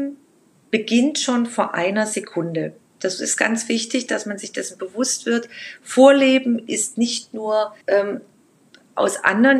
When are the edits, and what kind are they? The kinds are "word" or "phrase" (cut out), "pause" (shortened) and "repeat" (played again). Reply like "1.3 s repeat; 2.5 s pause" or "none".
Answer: 7.8 s pause